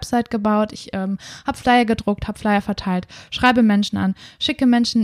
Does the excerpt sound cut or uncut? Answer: uncut